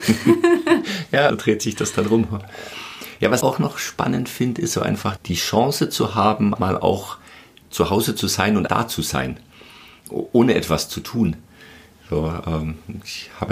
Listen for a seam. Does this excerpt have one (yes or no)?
yes